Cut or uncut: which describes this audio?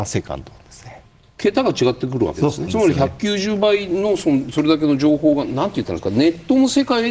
cut